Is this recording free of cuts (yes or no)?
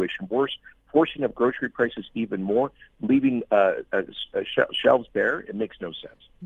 yes